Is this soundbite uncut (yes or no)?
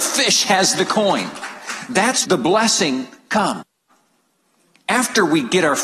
no